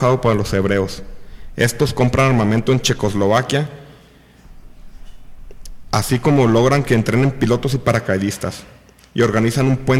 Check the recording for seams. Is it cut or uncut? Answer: uncut